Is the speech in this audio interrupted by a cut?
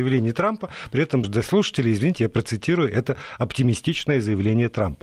yes; 1 cut; at 1.2 s

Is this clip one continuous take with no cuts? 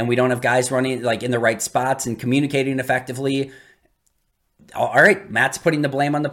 yes; 0 cuts

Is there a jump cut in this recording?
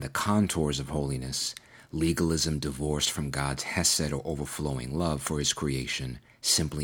no; 0 cuts

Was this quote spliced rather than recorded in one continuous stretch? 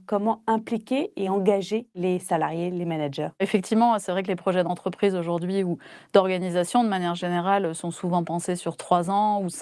no; 0 cuts

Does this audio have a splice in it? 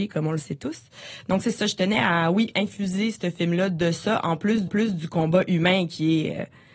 yes; 1 cut; at 4.7 s

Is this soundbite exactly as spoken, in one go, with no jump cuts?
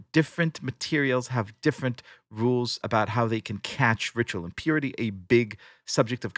yes; 0 cuts

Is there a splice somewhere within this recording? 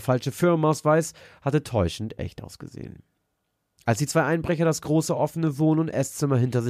no; 0 cuts

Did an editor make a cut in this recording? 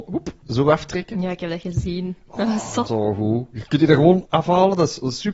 yes; 2 cuts; at 2.9 s, 4.2 s

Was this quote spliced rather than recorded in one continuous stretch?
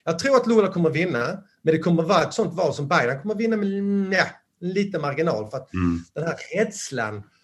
no; 0 cuts

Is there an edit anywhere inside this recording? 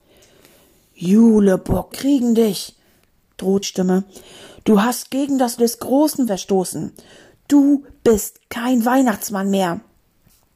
yes; 4 cuts; at 1.9 s, 3.6 s, 5.6 s, 6.3 s

